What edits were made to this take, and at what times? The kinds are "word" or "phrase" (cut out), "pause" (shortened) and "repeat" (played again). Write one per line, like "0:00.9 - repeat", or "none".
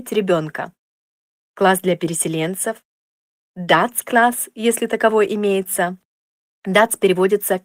none

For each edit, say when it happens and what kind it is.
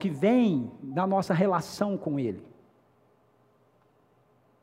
none

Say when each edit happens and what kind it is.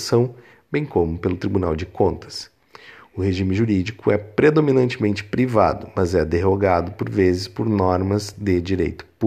none

